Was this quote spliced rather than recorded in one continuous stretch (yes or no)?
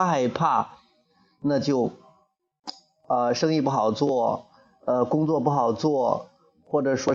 no